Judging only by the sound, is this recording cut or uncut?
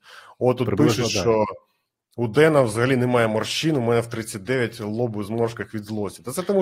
uncut